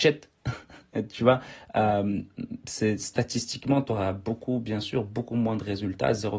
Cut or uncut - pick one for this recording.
uncut